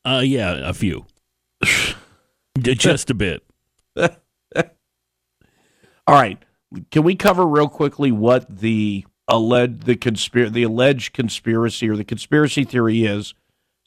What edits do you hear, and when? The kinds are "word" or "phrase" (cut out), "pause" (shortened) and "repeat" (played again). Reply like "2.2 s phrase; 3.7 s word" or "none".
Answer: 9.1 s pause